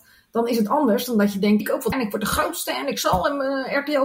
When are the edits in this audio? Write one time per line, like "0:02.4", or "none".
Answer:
0:01.6
0:01.9